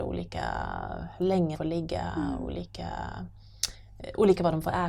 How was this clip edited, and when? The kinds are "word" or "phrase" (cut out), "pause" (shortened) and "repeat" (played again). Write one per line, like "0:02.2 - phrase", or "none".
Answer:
0:01.5 - word